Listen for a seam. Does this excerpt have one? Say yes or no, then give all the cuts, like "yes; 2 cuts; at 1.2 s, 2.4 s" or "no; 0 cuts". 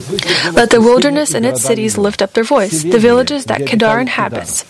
no; 0 cuts